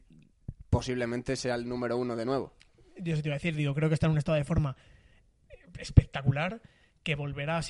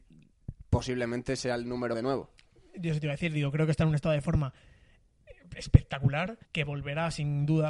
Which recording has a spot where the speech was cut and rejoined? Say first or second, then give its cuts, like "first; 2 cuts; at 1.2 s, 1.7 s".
second; 2 cuts; at 1.9 s, 6.5 s